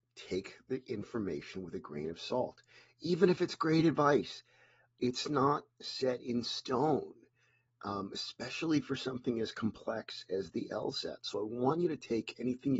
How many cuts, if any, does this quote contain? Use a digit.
0